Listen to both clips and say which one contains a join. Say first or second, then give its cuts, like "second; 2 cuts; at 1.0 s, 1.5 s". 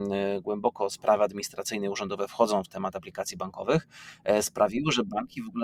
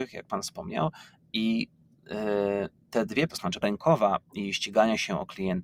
second; 2 cuts; at 3.3 s, 3.6 s